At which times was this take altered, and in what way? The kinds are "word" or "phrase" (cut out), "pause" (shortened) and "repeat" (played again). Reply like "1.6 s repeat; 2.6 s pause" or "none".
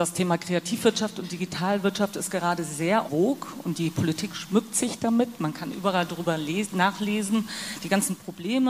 3.1 s word

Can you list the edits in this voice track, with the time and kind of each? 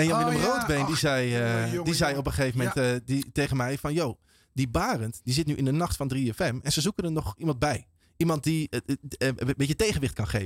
none

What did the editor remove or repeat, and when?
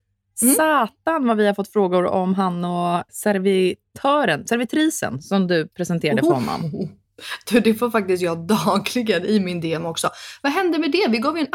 3.1 s word

